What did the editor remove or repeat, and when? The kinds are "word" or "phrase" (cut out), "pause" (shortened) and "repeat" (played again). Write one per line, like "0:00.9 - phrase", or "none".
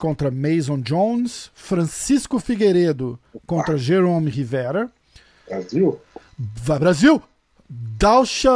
none

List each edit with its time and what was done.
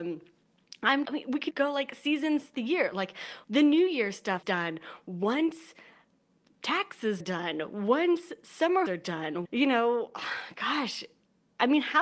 0:01.0 - word
0:01.5 - word
0:02.5 - word
0:03.4 - word
0:04.4 - word
0:07.2 - word
0:08.9 - word
0:09.4 - word

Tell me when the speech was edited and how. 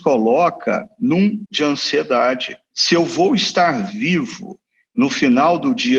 0:01.5 - phrase
0:02.7 - word

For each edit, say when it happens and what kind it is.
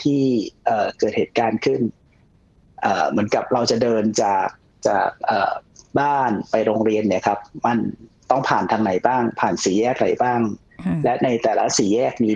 none

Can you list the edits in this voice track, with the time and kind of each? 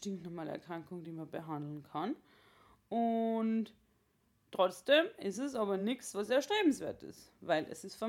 none

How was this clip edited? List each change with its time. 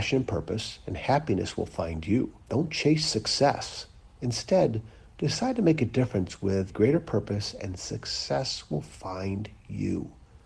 0:02.4 - pause
0:06.7 - word

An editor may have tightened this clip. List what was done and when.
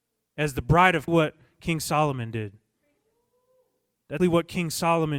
0:01.1 - phrase
0:04.2 - word

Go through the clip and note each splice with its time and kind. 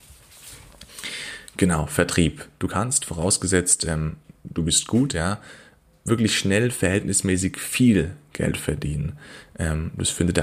none

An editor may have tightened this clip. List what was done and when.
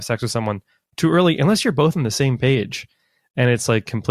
none

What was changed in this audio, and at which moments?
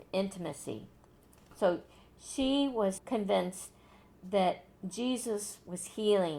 0:03.0 - word

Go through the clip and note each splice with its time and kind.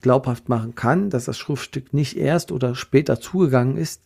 none

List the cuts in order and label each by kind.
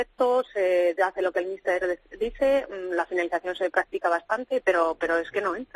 none

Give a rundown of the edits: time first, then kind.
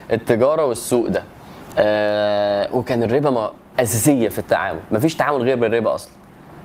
0:03.7 - word

